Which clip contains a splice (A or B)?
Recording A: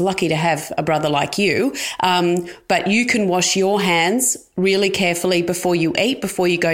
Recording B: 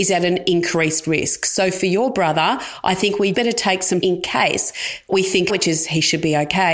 B